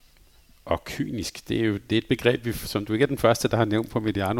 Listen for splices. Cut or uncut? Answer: uncut